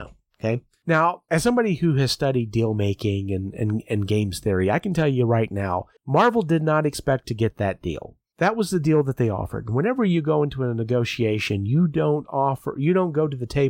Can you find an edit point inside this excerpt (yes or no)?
yes